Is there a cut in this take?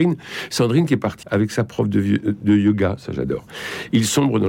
yes; 1 cut; at 1.2 s

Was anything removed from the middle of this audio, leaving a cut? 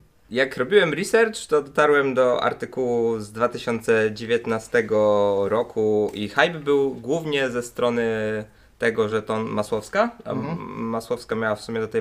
no; 0 cuts

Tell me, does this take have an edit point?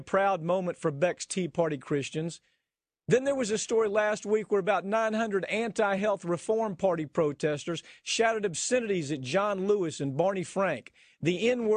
no; 0 cuts

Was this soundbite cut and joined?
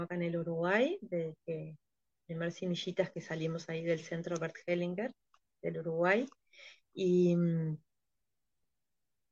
no; 0 cuts

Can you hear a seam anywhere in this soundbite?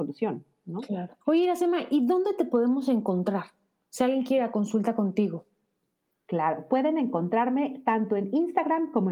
yes; 1 cut; at 1.2 s

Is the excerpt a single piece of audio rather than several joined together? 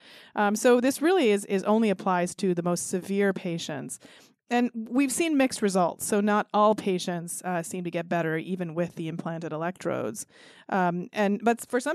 yes; 0 cuts

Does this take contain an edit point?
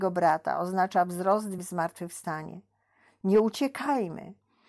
yes; 1 cut; at 1.6 s

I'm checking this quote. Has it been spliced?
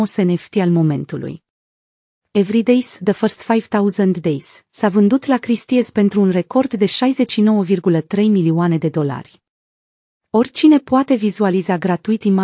no; 0 cuts

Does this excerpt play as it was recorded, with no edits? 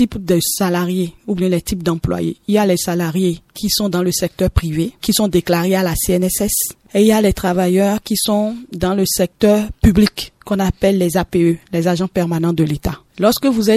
yes; 0 cuts

